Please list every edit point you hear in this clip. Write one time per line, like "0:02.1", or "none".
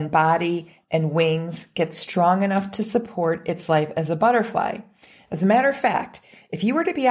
none